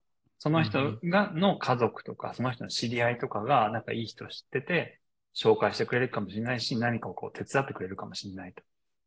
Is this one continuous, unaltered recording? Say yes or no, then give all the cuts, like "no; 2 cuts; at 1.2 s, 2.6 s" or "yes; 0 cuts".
no; 1 cut; at 5.2 s